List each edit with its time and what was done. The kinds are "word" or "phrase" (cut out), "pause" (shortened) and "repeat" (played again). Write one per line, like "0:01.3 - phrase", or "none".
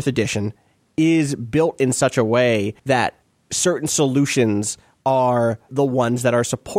0:02.8 - pause
0:05.7 - word